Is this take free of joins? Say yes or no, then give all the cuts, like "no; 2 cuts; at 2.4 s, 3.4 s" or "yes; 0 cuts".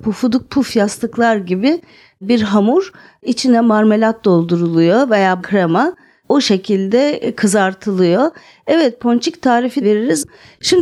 no; 2 cuts; at 5.4 s, 9.8 s